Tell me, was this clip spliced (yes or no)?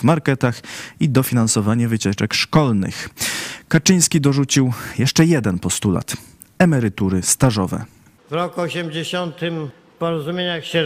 no